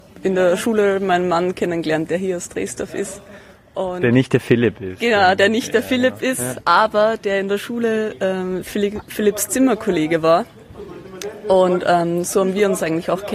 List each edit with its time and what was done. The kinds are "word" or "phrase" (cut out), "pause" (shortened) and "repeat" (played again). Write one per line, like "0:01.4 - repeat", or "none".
none

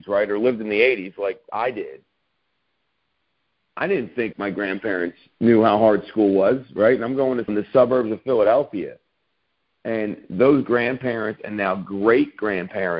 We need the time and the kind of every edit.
0:04.3 - word
0:07.5 - phrase

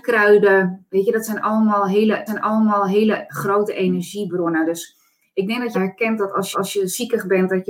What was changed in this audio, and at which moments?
0:02.3 - repeat
0:05.7 - phrase
0:06.5 - repeat

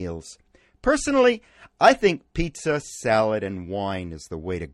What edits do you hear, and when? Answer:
none

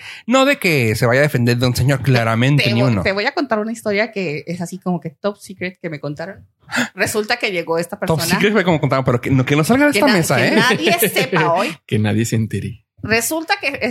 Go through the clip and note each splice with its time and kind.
0:09.4 - word

